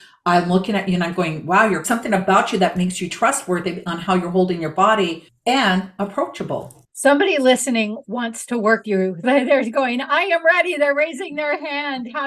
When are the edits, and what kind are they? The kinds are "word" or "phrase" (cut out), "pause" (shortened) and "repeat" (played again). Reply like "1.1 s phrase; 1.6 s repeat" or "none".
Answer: 1.8 s phrase; 8.8 s word; 9.2 s word